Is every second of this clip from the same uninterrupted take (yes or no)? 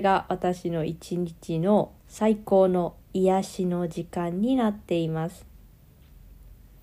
no